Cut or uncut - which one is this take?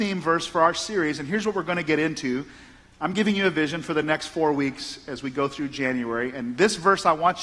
uncut